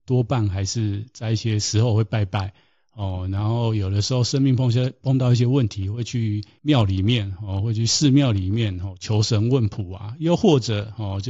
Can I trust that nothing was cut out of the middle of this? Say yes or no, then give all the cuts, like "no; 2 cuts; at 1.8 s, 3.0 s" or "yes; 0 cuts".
yes; 0 cuts